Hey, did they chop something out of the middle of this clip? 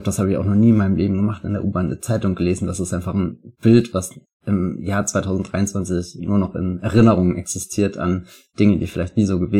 no; 0 cuts

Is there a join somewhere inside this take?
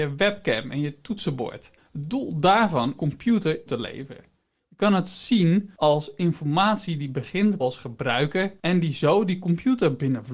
yes; 4 cuts; at 1.8 s, 3.0 s, 3.7 s, 7.6 s

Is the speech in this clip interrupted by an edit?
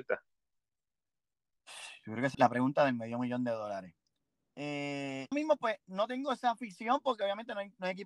yes; 2 cuts; at 2.3 s, 5.3 s

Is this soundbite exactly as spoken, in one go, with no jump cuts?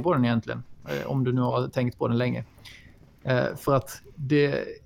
yes; 0 cuts

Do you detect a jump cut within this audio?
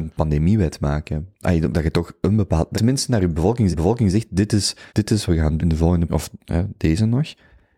yes; 8 cuts; at 1.3 s, 1.7 s, 2.7 s, 3.7 s, 4.9 s, 5.3 s, 5.6 s, 6.1 s

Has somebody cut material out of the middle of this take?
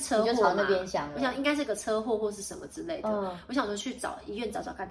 no; 0 cuts

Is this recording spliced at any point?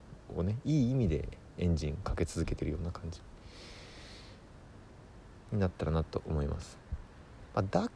yes; 1 cut; at 5.4 s

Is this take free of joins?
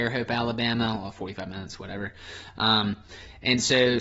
yes; 0 cuts

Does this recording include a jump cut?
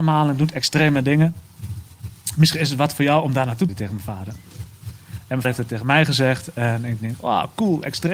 yes; 2 cuts; at 3.7 s, 5.4 s

